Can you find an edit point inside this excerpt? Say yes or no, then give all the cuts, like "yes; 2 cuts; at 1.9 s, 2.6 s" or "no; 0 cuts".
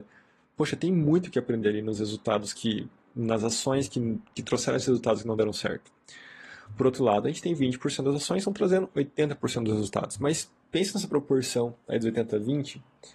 no; 0 cuts